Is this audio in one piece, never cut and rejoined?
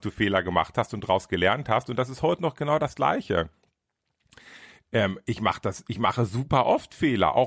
yes; 0 cuts

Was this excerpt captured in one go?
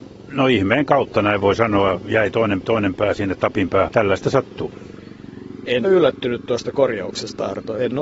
no; 3 cuts; at 2.6 s, 3.9 s, 5.8 s

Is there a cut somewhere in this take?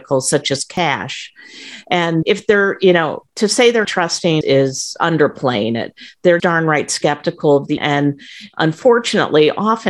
yes; 6 cuts; at 2.2 s, 3.3 s, 3.8 s, 4.4 s, 6.4 s, 7.8 s

